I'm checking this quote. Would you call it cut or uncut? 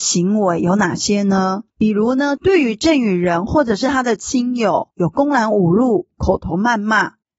cut